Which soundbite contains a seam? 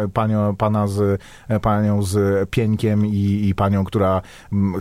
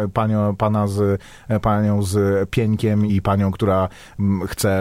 second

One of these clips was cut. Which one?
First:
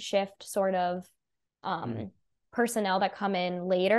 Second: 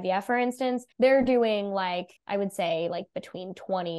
second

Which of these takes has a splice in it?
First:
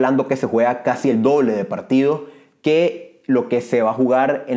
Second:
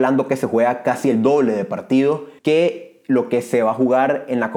second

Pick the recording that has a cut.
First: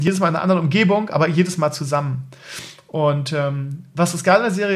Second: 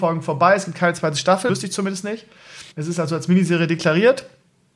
second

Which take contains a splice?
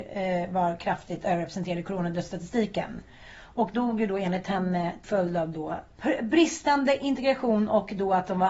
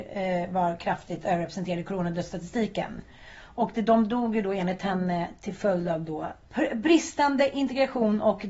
first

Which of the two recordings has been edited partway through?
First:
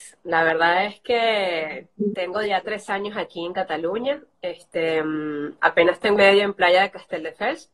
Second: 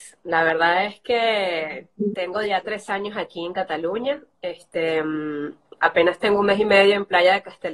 first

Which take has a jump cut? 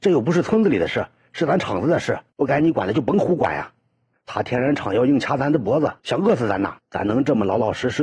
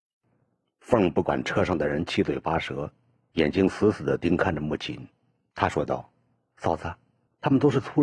first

